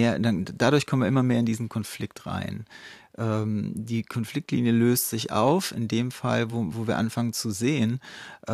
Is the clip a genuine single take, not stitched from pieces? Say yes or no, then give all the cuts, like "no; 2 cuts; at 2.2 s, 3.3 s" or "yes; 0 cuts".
yes; 0 cuts